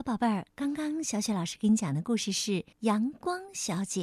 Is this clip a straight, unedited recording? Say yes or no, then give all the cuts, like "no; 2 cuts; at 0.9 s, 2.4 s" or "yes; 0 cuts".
no; 1 cut; at 2.7 s